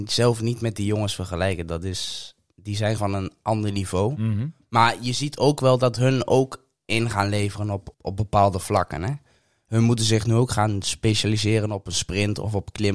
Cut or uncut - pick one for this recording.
cut